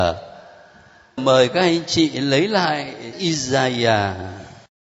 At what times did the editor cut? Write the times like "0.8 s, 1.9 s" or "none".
1.2 s, 3.1 s